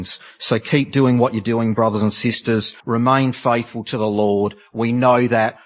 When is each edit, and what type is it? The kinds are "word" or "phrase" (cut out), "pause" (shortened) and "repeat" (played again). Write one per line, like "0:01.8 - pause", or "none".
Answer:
0:02.8 - pause